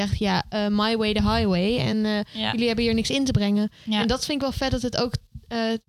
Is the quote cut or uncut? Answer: uncut